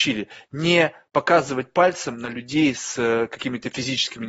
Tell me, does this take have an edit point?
no; 0 cuts

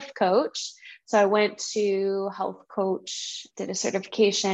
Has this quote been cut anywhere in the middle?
yes; 1 cut; at 3.5 s

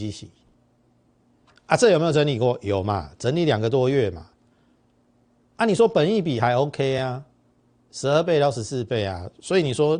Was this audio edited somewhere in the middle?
no; 0 cuts

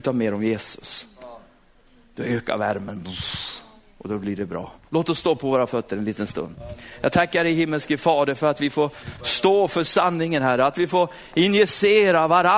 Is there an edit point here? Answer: no; 0 cuts

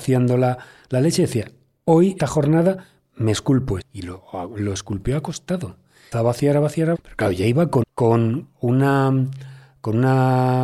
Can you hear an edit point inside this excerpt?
yes; 5 cuts; at 2.2 s, 3.8 s, 6.1 s, 6.9 s, 7.8 s

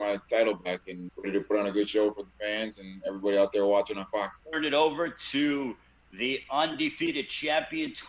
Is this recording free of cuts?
no; 2 cuts; at 1.1 s, 4.4 s

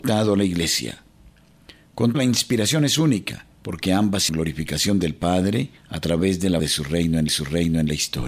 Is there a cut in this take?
yes; 6 cuts; at 2.1 s, 3.5 s, 4.3 s, 5.8 s, 6.6 s, 7.3 s

